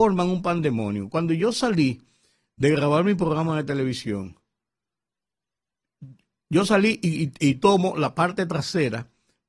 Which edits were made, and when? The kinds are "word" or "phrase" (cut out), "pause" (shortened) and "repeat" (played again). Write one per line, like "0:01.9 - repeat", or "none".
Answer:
none